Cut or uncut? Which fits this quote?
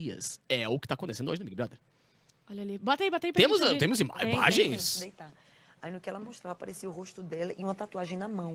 uncut